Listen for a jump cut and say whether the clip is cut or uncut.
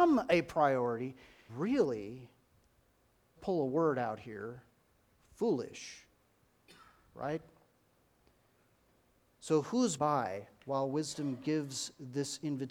cut